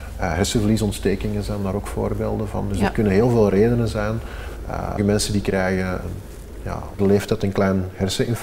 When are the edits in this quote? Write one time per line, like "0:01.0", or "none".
0:05.0
0:06.0
0:07.0